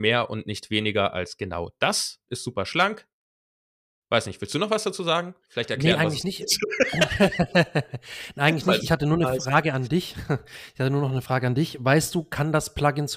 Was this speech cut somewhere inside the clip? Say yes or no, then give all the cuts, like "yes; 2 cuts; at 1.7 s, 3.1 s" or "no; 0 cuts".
no; 0 cuts